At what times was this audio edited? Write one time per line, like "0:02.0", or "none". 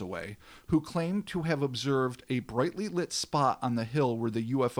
none